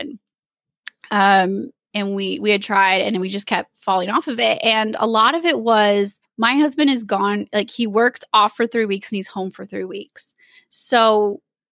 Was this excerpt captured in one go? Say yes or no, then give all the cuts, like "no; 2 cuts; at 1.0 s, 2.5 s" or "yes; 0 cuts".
no; 1 cut; at 6.2 s